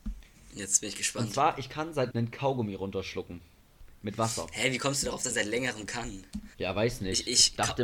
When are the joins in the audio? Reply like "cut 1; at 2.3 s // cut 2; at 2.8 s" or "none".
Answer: cut 1; at 2.1 s // cut 2; at 5.3 s // cut 3; at 6.5 s